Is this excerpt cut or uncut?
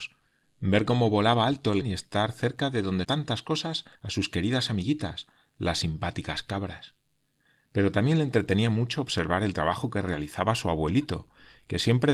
cut